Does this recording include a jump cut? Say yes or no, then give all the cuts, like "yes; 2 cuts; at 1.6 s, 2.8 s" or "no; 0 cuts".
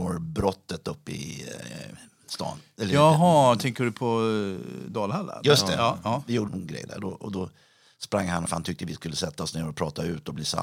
yes; 2 cuts; at 6.5 s, 8.5 s